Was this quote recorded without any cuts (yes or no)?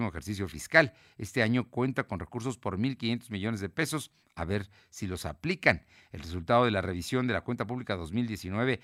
yes